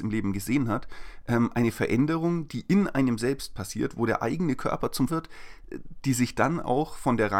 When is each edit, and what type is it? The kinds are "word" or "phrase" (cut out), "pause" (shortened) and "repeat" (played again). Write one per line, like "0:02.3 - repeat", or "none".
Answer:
0:05.1 - word

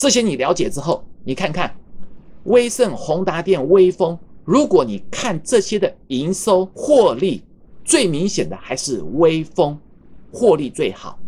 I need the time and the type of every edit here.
0:06.7 - pause

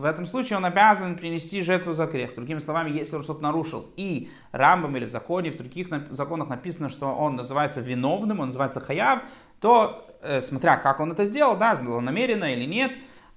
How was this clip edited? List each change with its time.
none

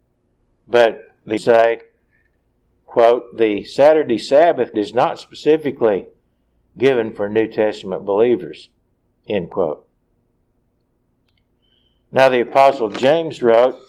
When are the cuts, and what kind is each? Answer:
0:01.4 - phrase
0:04.7 - word

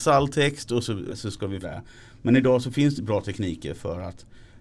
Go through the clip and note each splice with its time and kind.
0:01.1 - word
0:01.6 - phrase
0:03.0 - word

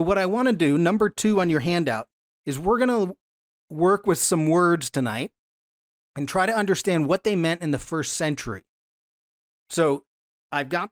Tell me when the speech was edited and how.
none

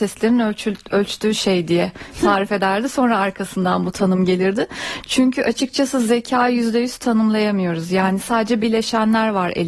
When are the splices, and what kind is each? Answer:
0:08.6 - word

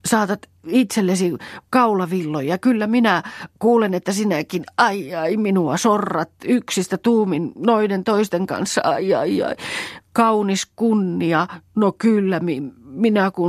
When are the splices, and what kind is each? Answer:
0:03.5 - pause

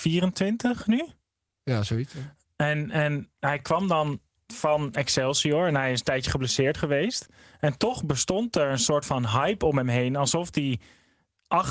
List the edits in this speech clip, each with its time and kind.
none

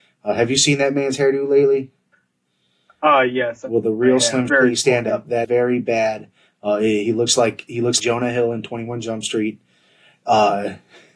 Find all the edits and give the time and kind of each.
0:04.5 - word
0:05.4 - word
0:08.0 - word

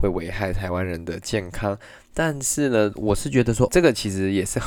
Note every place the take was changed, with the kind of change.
0:03.7 - word

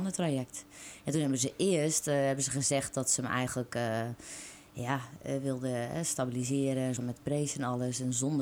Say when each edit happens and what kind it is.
0:07.0 - word

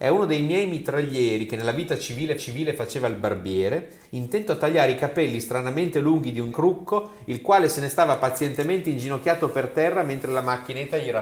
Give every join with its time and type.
0:02.4 - repeat
0:06.5 - word

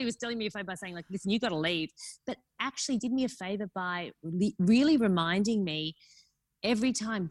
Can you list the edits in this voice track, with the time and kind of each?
none

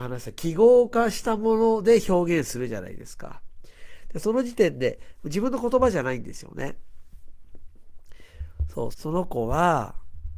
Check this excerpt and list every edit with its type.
0:08.9 - phrase

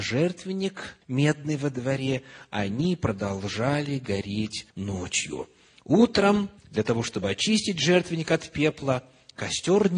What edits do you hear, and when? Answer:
0:01.0 - pause
0:04.7 - pause
0:06.6 - pause

